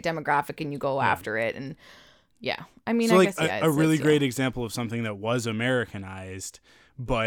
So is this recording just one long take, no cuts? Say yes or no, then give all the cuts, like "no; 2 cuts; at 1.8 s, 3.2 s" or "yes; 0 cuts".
yes; 0 cuts